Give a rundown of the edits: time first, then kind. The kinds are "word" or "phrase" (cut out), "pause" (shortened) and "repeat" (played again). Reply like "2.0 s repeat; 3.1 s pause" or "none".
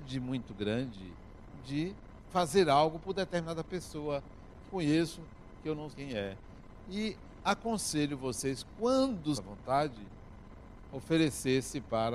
4.7 s phrase; 5.9 s word; 9.3 s phrase